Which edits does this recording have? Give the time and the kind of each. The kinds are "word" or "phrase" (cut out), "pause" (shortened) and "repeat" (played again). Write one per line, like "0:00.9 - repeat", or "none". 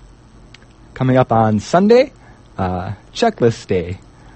none